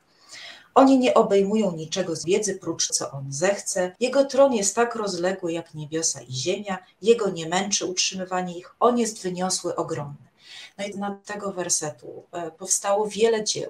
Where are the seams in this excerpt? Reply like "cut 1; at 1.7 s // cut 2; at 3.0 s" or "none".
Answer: cut 1; at 2.2 s // cut 2; at 2.9 s // cut 3; at 4.0 s // cut 4; at 10.9 s // cut 5; at 11.2 s